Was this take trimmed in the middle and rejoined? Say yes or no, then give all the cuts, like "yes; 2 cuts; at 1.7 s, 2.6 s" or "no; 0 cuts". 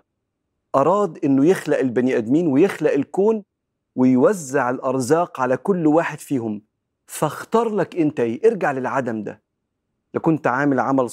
no; 0 cuts